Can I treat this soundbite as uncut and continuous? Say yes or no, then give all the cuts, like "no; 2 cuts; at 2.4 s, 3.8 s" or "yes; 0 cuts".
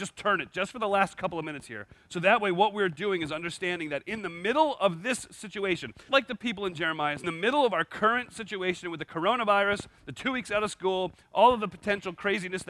no; 2 cuts; at 6.1 s, 7.2 s